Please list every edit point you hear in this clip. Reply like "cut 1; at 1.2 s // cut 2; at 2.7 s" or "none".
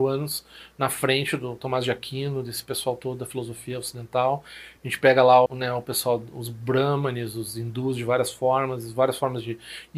cut 1; at 5.5 s